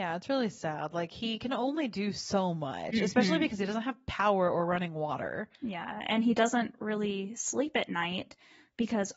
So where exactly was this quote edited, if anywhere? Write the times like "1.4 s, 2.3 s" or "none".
5.5 s